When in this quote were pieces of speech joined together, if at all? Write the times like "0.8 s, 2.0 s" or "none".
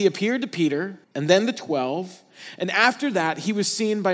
1.0 s